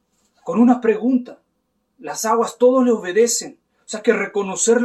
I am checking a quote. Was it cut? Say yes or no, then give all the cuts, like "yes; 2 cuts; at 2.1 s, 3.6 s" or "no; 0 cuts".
yes; 1 cut; at 1.5 s